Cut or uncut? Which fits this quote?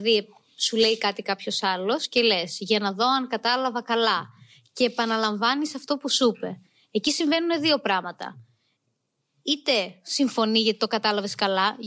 uncut